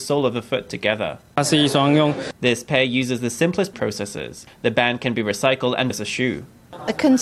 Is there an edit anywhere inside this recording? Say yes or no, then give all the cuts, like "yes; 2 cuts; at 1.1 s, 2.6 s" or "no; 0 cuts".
yes; 2 cuts; at 3.7 s, 5.9 s